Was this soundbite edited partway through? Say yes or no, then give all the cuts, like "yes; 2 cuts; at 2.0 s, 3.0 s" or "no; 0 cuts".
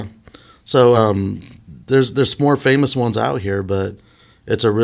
no; 0 cuts